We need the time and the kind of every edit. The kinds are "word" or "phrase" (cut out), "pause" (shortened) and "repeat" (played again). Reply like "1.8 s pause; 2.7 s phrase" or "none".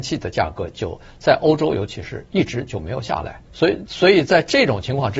3.5 s pause